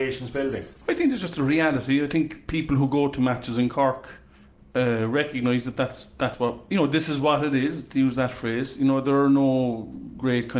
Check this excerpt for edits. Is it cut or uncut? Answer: uncut